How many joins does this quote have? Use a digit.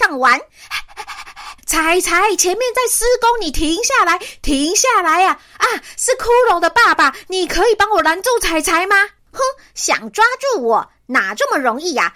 1